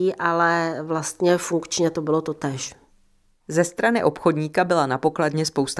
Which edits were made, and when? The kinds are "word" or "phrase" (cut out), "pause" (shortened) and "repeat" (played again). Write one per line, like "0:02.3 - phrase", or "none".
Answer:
none